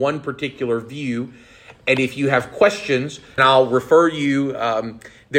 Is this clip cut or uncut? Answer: cut